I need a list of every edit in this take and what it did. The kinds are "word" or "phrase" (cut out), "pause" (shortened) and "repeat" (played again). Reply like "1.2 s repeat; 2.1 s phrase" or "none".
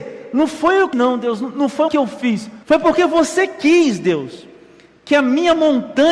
0.9 s word; 1.9 s phrase; 2.6 s pause